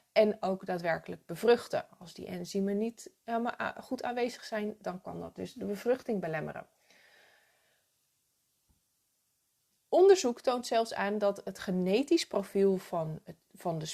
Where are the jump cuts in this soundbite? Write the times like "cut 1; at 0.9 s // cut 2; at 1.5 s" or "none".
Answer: none